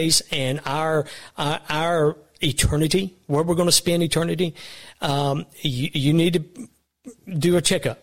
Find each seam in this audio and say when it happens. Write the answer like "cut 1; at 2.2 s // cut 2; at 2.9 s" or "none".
none